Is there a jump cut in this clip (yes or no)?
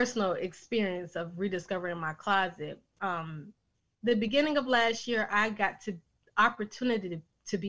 no